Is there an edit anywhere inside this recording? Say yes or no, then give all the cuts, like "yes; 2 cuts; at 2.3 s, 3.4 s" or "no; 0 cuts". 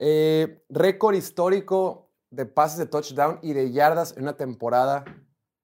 no; 0 cuts